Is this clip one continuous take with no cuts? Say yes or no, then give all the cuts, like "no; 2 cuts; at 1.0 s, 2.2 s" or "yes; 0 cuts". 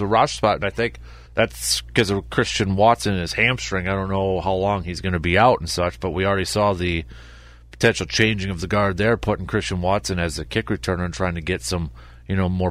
no; 1 cut; at 1.2 s